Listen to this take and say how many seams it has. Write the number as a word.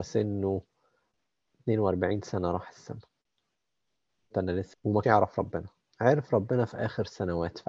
three